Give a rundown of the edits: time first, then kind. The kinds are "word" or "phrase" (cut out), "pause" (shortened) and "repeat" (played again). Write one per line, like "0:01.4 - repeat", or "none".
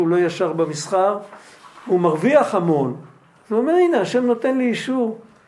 none